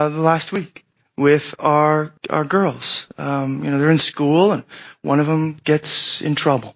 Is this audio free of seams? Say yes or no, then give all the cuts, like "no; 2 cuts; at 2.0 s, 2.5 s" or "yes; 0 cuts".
no; 2 cuts; at 1.0 s, 2.2 s